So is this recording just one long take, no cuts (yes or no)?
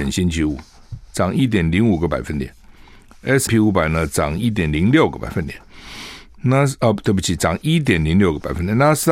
no